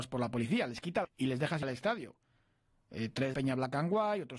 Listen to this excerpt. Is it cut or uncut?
cut